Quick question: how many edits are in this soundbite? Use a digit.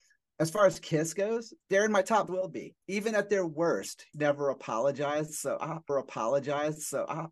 5